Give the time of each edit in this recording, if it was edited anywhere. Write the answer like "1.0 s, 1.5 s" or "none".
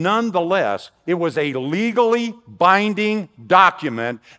none